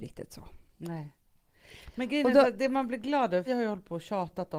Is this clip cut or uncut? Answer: cut